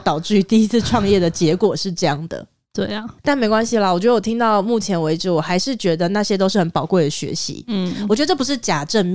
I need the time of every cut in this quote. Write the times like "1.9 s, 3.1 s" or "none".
3.2 s